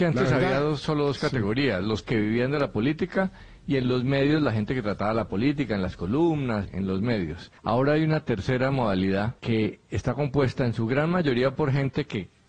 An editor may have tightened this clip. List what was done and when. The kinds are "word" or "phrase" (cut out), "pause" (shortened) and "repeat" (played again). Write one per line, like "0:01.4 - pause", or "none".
0:02.0 - word
0:06.6 - word
0:07.6 - pause
0:09.4 - pause